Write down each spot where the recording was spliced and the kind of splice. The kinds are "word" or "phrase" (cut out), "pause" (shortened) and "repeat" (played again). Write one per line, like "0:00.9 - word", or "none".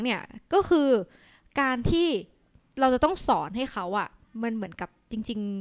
none